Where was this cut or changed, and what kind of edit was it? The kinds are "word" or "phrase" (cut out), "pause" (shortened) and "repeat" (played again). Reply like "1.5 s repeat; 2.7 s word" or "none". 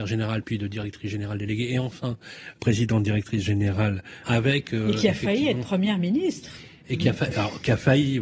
2.5 s word; 4.2 s word